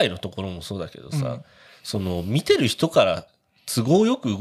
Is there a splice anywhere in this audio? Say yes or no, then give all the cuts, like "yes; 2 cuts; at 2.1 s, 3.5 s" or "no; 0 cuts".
no; 0 cuts